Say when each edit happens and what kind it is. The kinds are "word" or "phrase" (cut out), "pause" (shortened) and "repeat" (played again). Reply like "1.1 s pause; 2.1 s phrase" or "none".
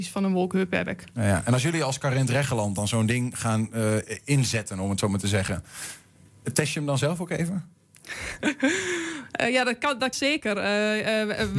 10.1 s word